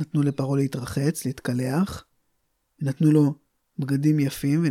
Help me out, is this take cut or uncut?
uncut